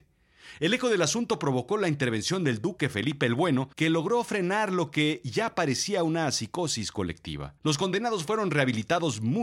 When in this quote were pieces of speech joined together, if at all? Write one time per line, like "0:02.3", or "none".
0:03.7
0:07.6